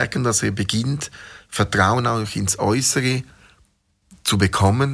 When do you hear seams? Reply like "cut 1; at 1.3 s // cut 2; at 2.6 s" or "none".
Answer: none